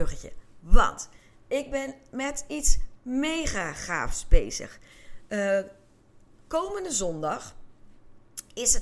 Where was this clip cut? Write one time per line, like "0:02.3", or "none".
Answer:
none